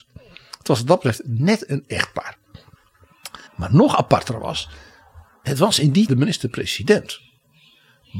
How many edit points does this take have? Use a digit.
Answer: 3